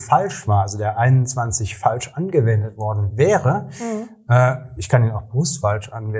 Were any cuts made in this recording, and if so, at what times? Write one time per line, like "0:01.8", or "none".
none